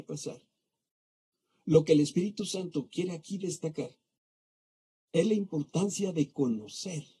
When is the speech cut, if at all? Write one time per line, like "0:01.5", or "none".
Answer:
none